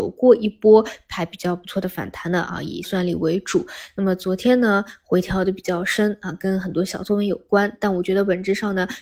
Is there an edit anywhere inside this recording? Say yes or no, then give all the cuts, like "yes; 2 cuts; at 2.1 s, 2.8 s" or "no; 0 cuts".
yes; 1 cut; at 2.8 s